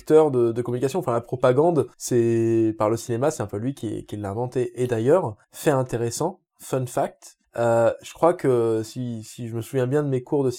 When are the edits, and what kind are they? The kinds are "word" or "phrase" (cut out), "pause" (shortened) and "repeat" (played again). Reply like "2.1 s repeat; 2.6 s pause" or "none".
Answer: 1.9 s pause; 5.4 s pause; 7.4 s pause